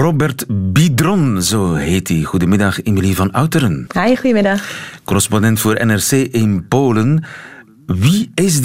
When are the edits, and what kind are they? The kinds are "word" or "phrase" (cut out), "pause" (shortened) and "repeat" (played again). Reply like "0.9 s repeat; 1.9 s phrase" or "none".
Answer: none